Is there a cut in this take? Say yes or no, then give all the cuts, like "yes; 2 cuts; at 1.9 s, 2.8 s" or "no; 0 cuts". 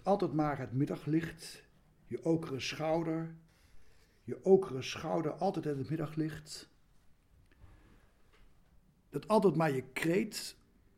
no; 0 cuts